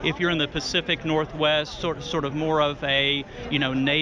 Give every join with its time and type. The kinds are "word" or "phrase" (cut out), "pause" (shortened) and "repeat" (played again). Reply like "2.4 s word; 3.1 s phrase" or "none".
none